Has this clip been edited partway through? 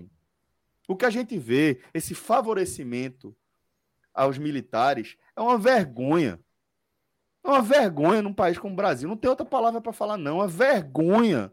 no; 0 cuts

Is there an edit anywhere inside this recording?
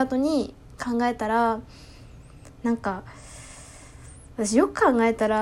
no; 0 cuts

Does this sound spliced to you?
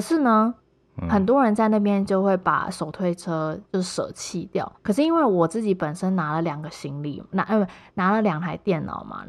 yes; 2 cuts; at 3.6 s, 4.8 s

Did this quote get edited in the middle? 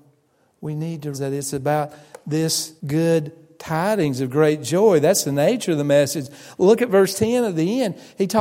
yes; 2 cuts; at 1.1 s, 2.8 s

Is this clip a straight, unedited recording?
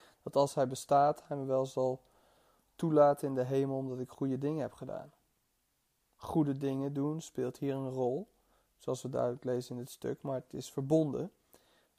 yes; 0 cuts

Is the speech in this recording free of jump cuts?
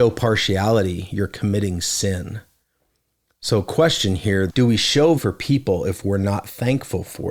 no; 2 cuts; at 4.5 s, 5.2 s

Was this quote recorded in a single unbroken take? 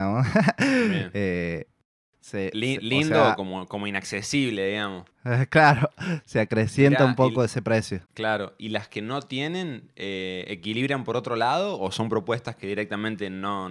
no; 2 cuts; at 5.1 s, 8.1 s

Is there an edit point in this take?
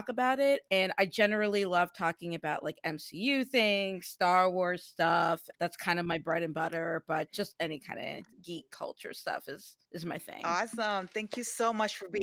yes; 3 cuts; at 5.5 s, 8.3 s, 9.8 s

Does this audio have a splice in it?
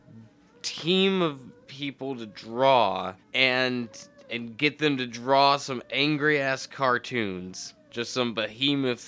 yes; 1 cut; at 3.2 s

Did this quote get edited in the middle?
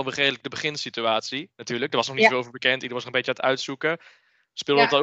no; 0 cuts

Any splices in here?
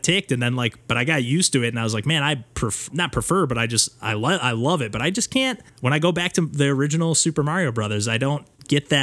yes; 2 cuts; at 2.9 s, 5.7 s

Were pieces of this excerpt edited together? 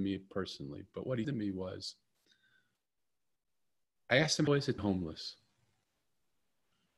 yes; 3 cuts; at 1.2 s, 4.5 s, 4.8 s

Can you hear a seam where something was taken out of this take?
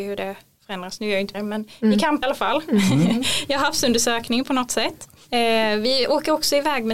yes; 2 cuts; at 1.3 s, 2.2 s

